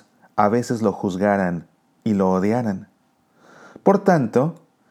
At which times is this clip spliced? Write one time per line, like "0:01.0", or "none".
none